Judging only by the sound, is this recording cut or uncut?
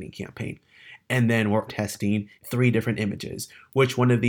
cut